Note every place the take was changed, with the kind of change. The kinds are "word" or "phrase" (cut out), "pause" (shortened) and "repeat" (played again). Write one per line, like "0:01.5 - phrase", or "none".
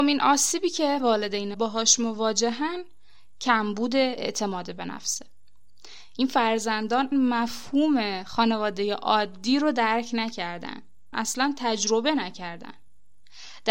0:01.0 - word
0:01.5 - word
0:07.1 - word
0:11.1 - word